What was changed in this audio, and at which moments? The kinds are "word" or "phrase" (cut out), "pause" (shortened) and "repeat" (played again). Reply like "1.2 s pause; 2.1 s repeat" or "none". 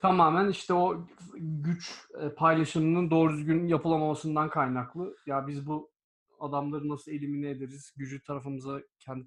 none